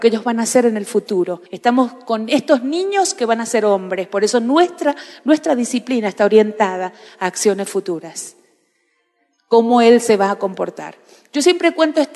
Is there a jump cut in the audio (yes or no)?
yes